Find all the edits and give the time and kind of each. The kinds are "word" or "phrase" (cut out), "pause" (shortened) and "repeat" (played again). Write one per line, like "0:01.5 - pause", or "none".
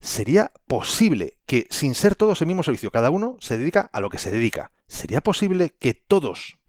0:04.8 - pause